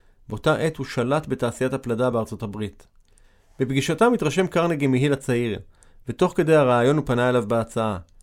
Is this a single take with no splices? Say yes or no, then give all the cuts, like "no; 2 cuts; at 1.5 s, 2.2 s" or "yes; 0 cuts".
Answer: yes; 0 cuts